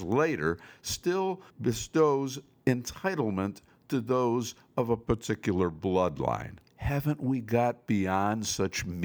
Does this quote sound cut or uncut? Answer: cut